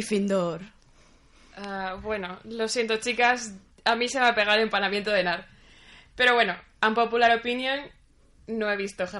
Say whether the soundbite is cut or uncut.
uncut